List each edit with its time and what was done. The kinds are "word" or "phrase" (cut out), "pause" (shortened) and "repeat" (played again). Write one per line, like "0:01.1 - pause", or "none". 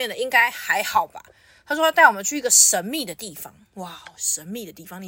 none